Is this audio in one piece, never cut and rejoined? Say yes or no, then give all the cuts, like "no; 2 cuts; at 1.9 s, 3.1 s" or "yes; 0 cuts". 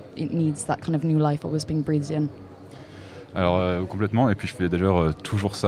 yes; 0 cuts